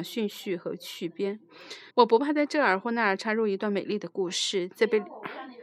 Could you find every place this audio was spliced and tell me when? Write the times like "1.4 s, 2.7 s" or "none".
1.9 s